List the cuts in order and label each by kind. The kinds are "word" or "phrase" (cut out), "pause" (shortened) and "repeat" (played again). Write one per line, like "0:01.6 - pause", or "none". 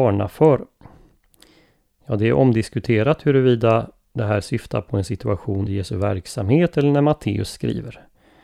0:05.7 - word